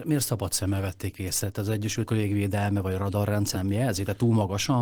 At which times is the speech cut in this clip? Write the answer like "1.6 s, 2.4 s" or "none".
2.1 s, 3.5 s

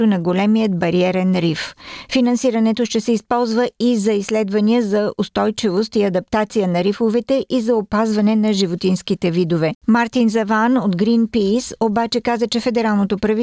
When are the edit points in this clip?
9.8 s

